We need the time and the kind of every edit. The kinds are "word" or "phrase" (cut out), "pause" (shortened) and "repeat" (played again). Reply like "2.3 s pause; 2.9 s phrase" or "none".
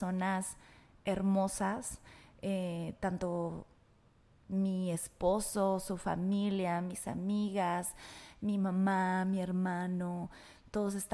none

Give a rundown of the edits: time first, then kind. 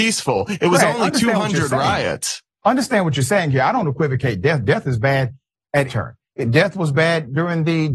5.9 s word

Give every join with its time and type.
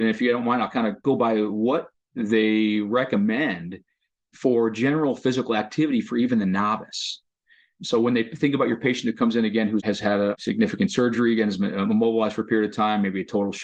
1.9 s pause

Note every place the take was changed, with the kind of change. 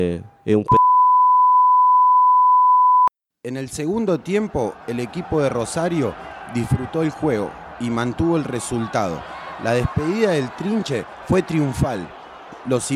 none

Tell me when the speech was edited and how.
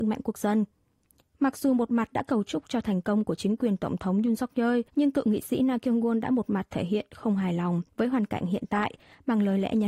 4.9 s pause; 7.9 s pause

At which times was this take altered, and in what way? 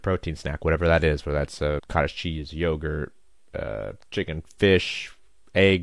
1.8 s word

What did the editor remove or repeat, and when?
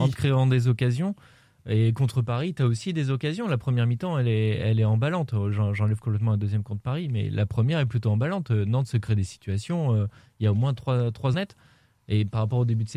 11.3 s word

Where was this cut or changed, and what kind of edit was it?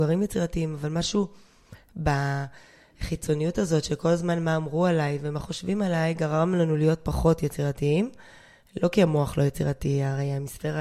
none

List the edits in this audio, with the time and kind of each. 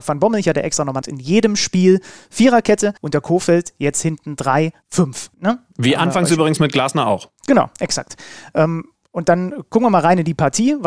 1.0 s word; 3.0 s pause; 4.8 s word; 5.3 s pause; 7.4 s pause

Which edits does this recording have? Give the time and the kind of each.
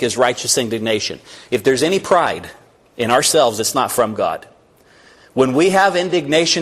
none

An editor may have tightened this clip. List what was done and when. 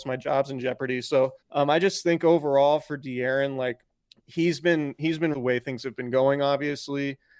1.4 s pause; 3.9 s pause; 5.3 s phrase

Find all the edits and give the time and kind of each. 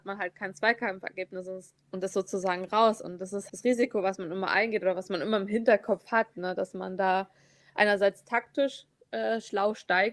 3.5 s word

